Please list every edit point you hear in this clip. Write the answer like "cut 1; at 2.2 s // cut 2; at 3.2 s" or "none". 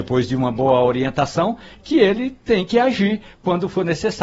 none